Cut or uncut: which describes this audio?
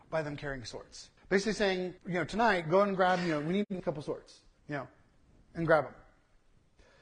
cut